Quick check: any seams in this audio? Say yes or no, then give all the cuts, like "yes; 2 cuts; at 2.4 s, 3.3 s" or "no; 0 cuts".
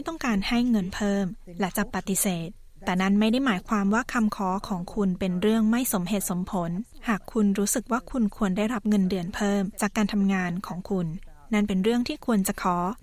no; 0 cuts